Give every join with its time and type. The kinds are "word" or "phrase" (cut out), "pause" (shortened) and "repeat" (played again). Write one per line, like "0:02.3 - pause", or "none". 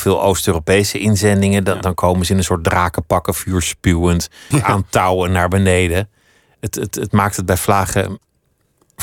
0:04.5 - word
0:06.9 - repeat